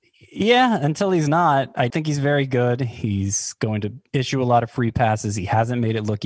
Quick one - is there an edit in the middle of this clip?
yes; 1 cut; at 1.9 s

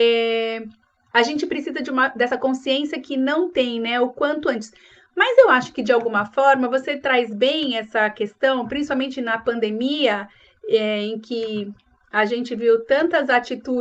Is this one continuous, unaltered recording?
yes; 0 cuts

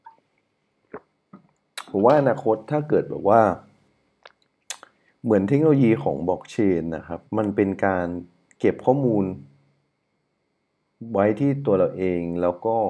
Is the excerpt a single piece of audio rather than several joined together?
no; 1 cut; at 7.3 s

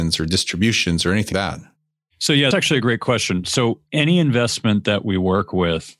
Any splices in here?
yes; 2 cuts; at 1.3 s, 2.5 s

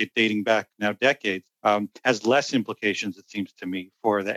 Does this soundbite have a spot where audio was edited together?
yes; 1 cut; at 1.5 s

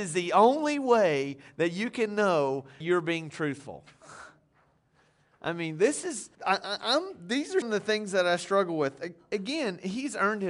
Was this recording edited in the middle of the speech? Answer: yes; 3 cuts; at 2.8 s, 6.3 s, 7.6 s

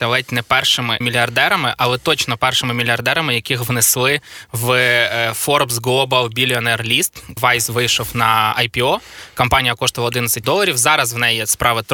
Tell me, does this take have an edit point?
yes; 3 cuts; at 1.0 s, 7.4 s, 10.4 s

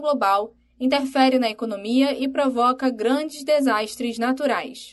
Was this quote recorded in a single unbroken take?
yes; 0 cuts

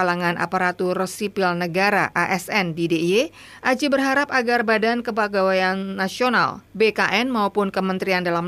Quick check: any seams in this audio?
no; 0 cuts

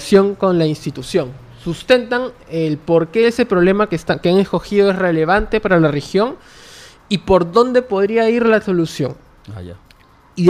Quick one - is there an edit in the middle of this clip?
no; 0 cuts

